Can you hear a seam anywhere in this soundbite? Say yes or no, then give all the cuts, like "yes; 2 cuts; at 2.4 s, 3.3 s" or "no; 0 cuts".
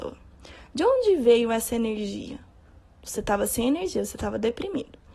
no; 0 cuts